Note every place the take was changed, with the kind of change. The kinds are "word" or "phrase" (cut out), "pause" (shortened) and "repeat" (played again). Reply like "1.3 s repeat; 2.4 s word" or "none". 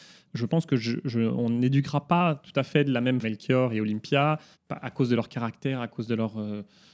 3.2 s word; 4.5 s pause